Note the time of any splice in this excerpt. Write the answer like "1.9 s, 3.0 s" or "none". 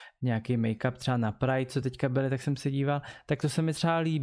none